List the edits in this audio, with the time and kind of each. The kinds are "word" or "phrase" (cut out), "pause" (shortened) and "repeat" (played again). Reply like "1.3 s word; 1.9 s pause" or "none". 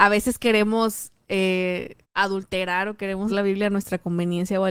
2.0 s pause; 3.3 s word